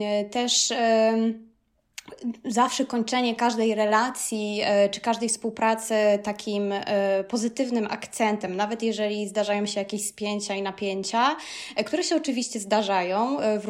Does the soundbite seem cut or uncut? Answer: uncut